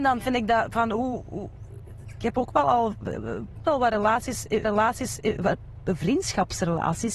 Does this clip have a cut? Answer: yes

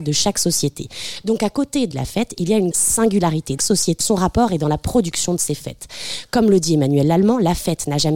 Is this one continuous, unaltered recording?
no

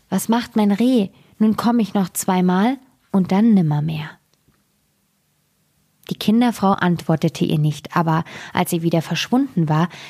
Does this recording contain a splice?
no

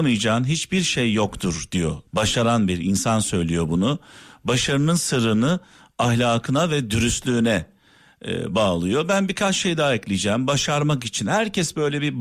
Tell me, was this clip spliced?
yes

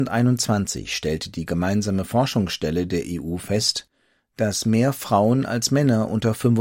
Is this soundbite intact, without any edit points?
yes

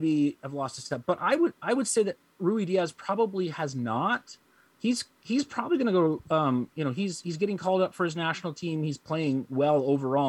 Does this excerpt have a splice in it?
no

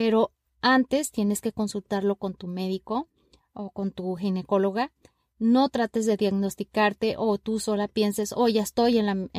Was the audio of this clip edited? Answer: no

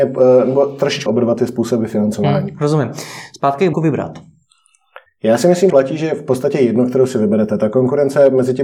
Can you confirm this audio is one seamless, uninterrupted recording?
no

